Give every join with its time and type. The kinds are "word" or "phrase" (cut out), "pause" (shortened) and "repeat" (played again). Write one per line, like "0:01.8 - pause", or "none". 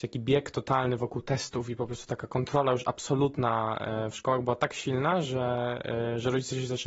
none